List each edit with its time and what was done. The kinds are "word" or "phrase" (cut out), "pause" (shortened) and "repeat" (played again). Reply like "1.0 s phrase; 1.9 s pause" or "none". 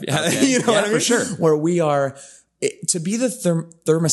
none